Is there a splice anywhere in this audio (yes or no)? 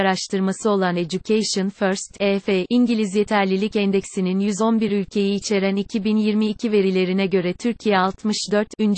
no